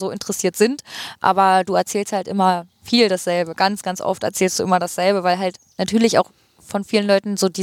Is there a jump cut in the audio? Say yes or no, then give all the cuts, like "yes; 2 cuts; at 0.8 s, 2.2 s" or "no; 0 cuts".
no; 0 cuts